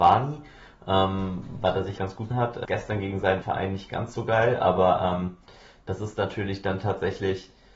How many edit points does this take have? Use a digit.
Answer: 4